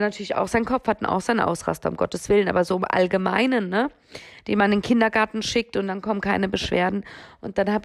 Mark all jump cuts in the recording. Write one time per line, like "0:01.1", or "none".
none